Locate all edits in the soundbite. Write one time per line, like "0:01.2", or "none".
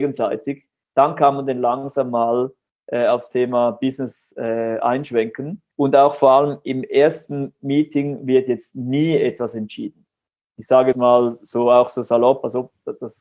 0:05.7
0:10.9